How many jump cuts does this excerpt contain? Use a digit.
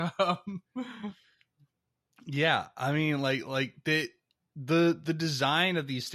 0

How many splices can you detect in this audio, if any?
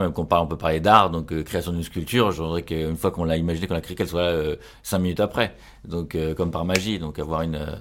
0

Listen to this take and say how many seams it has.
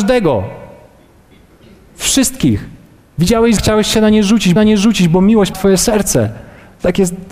3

